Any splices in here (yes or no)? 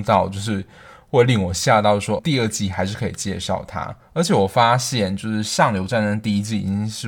yes